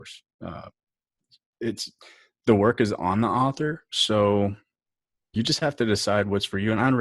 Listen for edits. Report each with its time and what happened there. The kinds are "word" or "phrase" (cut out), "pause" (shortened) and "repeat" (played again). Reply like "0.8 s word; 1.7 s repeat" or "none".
none

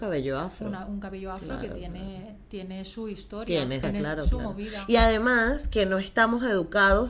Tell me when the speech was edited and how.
3.8 s phrase

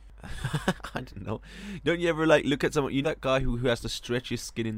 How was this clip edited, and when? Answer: 3.0 s word

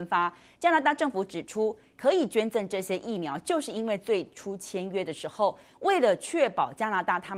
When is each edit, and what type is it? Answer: none

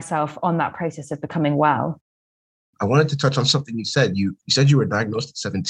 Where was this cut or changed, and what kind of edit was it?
none

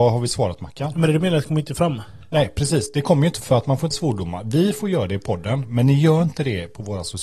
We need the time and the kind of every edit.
3.4 s word; 3.9 s word

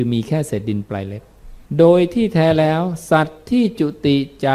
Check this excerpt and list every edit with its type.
1.7 s pause

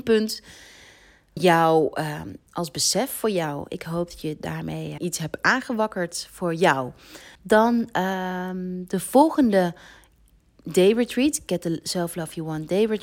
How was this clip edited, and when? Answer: 1.4 s word; 5.0 s phrase; 7.3 s pause

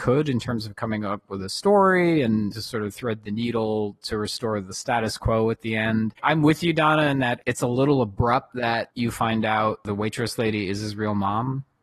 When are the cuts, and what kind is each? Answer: 2.5 s phrase; 6.2 s pause

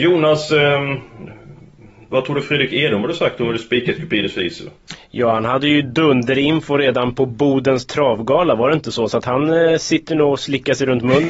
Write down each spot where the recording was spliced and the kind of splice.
none

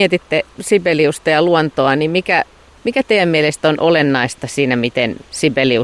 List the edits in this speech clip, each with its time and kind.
none

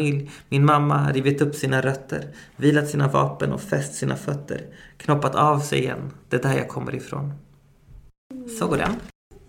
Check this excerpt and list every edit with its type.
none

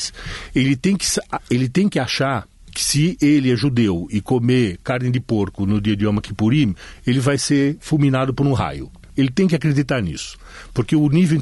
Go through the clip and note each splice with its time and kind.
none

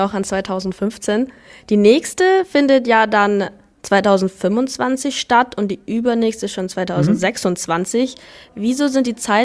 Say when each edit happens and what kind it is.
none

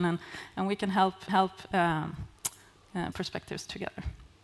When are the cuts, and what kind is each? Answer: 1.3 s repeat; 3.1 s phrase

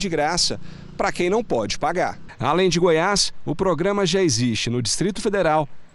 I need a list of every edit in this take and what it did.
none

